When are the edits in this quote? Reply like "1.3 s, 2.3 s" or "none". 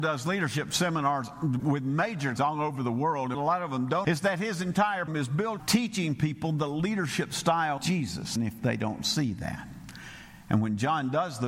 1.6 s, 2.4 s, 3.3 s, 4.0 s, 5.1 s, 5.6 s, 7.8 s, 8.4 s